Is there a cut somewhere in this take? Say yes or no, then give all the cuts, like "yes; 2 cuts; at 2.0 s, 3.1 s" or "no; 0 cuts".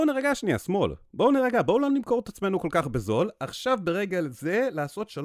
no; 0 cuts